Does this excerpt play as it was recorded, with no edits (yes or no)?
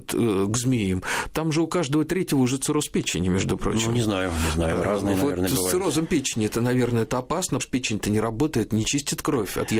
no